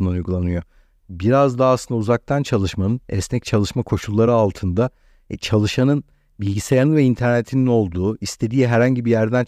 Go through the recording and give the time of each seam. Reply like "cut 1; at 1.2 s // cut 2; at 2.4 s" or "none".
none

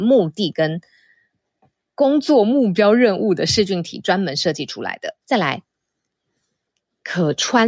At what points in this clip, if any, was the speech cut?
cut 1; at 5.2 s

